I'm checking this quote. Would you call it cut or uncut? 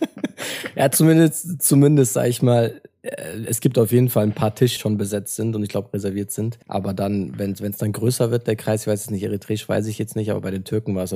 cut